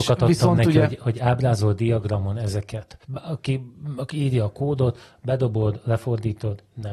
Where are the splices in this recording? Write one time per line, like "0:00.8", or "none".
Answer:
0:03.0